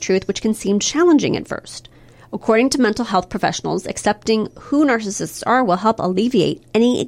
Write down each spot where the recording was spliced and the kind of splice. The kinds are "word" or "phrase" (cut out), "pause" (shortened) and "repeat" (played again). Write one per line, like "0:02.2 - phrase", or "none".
none